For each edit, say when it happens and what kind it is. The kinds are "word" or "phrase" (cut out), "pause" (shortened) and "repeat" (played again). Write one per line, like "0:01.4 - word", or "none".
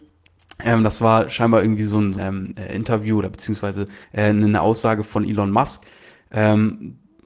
0:02.2 - word
0:04.0 - pause